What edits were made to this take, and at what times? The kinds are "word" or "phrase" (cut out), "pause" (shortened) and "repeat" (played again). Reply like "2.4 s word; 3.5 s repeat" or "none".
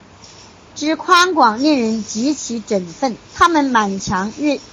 3.2 s pause